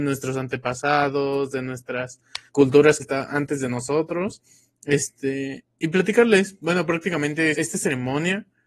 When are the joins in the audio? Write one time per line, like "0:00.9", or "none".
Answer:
0:02.5
0:03.0
0:05.7
0:07.5